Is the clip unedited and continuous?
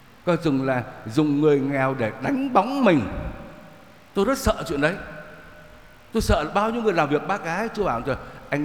yes; 0 cuts

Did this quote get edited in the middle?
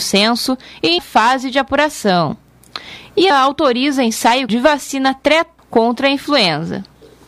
yes; 4 cuts; at 1.0 s, 3.3 s, 4.5 s, 5.6 s

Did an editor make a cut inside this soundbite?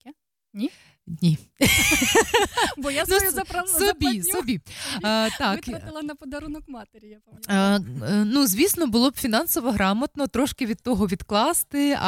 no; 0 cuts

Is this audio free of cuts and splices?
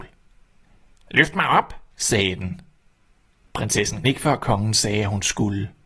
no; 2 cuts; at 1.9 s, 4.0 s

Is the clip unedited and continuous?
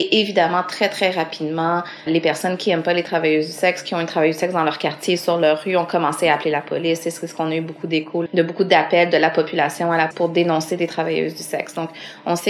no; 3 cuts; at 2.1 s, 8.3 s, 10.1 s

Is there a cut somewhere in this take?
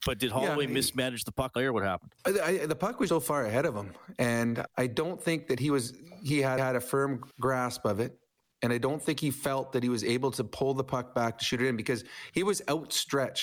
yes; 6 cuts; at 1.6 s, 2.2 s, 3.1 s, 4.7 s, 6.6 s, 7.3 s

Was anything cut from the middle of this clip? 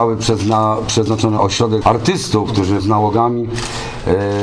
yes; 3 cuts; at 1.4 s, 1.8 s, 2.8 s

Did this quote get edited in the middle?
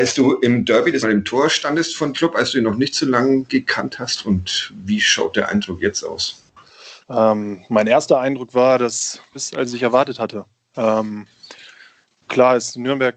yes; 5 cuts; at 1.0 s, 2.1 s, 7.0 s, 9.4 s, 12.3 s

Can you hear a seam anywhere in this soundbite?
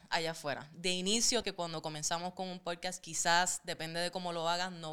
yes; 1 cut; at 1.4 s

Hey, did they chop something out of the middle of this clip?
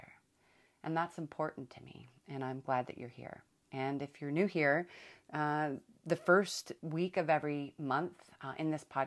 yes; 2 cuts; at 3.5 s, 6.8 s

